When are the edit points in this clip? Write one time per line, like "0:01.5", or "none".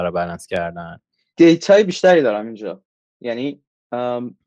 0:01.3